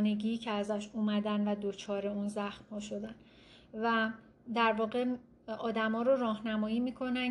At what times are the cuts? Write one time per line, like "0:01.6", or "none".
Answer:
none